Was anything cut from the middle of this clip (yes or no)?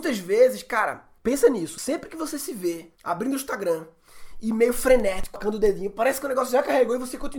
yes